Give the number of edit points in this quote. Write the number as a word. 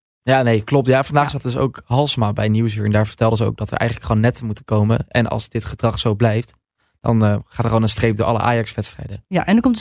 zero